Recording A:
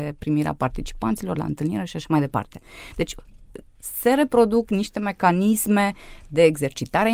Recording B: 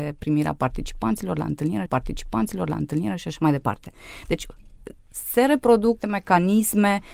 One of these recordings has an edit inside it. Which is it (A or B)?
B